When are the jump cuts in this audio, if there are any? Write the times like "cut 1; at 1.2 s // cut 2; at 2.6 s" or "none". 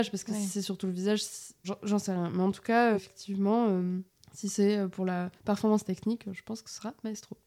cut 1; at 1.6 s // cut 2; at 2.9 s // cut 3; at 4.1 s // cut 4; at 5.4 s

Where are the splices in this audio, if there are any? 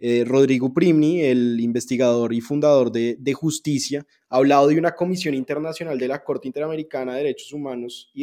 none

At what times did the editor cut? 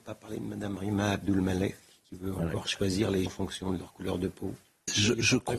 cut 1; at 3.3 s

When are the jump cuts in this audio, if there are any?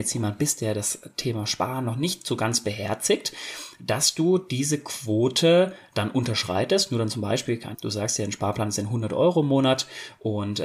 cut 1; at 7.7 s

